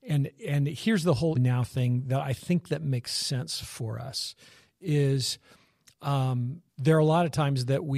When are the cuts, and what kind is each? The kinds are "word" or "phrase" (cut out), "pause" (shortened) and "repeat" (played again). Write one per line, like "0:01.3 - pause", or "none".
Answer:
0:01.3 - word
0:06.7 - pause